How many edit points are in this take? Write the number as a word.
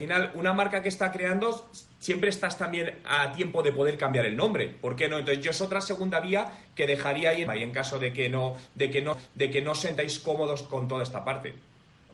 two